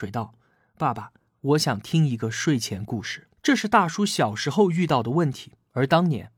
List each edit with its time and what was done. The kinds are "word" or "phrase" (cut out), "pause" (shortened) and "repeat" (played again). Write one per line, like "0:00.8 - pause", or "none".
0:03.4 - pause